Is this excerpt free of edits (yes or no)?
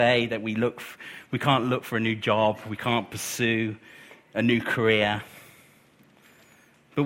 yes